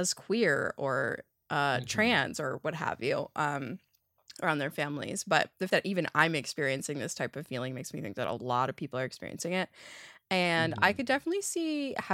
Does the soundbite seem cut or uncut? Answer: cut